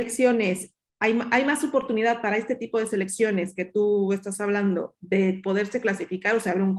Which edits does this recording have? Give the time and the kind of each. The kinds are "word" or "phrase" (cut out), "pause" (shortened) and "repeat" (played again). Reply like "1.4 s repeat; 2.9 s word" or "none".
none